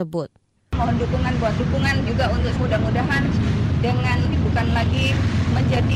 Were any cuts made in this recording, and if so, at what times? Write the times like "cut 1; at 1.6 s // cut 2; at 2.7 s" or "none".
cut 1; at 1.6 s // cut 2; at 2.6 s // cut 3; at 4.3 s